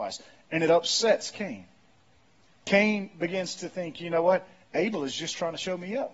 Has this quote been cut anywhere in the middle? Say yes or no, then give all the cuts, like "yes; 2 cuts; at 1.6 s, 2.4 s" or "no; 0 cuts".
no; 0 cuts